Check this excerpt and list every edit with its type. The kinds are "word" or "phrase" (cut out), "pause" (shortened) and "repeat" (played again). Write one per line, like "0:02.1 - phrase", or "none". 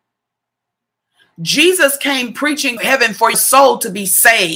0:02.8 - phrase
0:03.3 - word